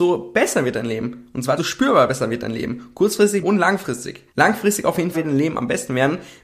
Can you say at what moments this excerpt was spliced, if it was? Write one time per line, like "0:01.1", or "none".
0:01.6
0:03.4
0:04.3
0:05.1